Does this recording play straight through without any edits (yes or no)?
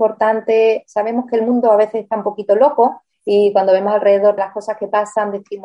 no